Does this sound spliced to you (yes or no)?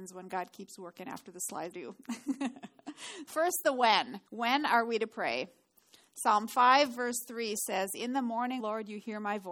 yes